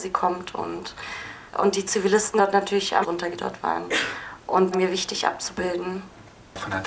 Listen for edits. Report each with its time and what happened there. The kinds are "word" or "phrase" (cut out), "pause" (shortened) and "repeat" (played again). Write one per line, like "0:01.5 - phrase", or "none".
0:01.5 - pause
0:02.4 - word
0:03.0 - word
0:03.3 - word
0:04.7 - phrase